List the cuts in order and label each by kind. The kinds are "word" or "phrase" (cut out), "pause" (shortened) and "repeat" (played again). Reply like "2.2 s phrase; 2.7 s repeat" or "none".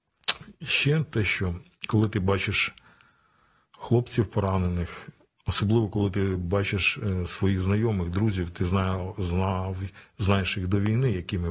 none